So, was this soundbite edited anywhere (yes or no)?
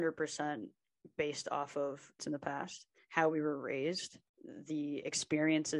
yes